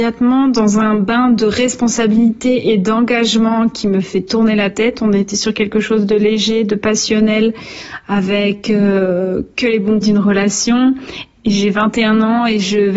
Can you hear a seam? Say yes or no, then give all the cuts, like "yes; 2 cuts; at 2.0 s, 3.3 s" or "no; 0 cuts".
yes; 1 cut; at 10.0 s